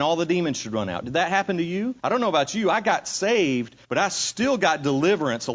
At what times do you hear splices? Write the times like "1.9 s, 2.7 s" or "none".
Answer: 2.0 s, 3.8 s

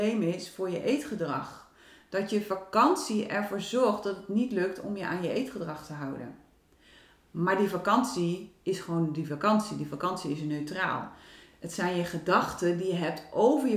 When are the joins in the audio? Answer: none

